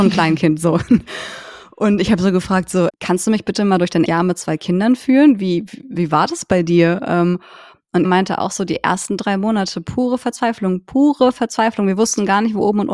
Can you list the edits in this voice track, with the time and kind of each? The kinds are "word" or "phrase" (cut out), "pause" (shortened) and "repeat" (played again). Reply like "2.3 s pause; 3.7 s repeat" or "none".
2.9 s word; 4.1 s word; 5.8 s word; 8.0 s word